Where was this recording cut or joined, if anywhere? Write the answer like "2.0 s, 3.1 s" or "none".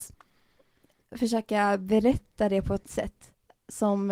2.8 s